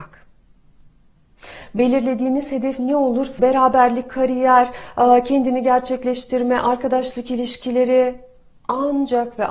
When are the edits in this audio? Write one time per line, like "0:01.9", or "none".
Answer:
0:03.4